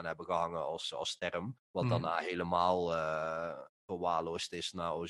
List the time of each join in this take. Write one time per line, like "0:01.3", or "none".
0:01.6

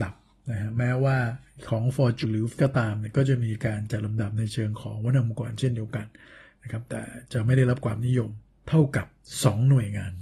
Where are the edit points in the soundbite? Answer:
0:02.2
0:02.5

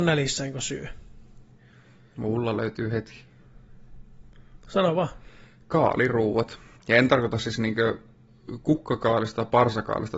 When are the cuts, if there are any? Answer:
0:06.8

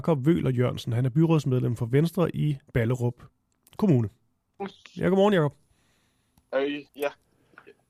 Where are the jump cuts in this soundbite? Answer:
0:02.7
0:04.9
0:06.9

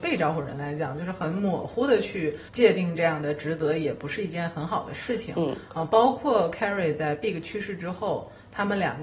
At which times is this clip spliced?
0:02.5

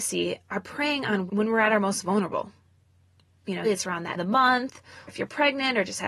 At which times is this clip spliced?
0:01.3
0:03.6
0:04.1
0:05.1

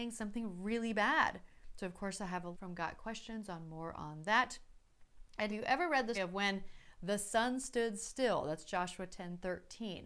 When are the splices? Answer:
0:02.5
0:05.5
0:06.1

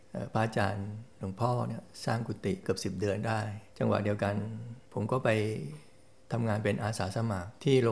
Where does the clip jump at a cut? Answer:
none

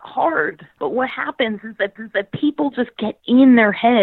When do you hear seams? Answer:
0:02.0

